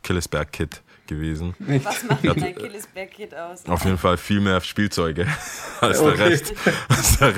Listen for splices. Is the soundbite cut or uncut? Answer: uncut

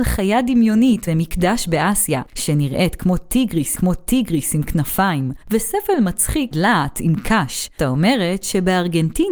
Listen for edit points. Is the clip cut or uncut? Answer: cut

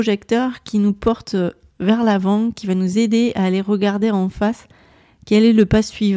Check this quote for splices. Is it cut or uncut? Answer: uncut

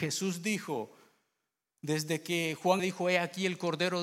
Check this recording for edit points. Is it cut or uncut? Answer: cut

